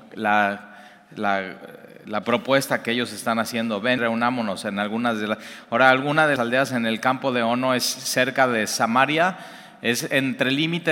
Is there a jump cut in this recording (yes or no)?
yes